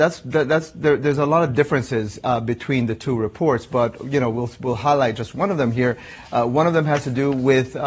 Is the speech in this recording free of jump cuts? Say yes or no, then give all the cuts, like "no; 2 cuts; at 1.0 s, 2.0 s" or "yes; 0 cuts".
yes; 0 cuts